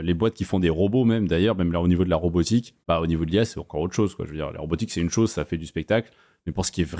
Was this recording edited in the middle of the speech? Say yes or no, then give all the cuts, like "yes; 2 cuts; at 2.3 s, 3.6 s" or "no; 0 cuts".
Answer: yes; 2 cuts; at 2.8 s, 4.5 s